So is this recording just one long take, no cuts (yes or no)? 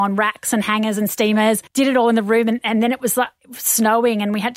no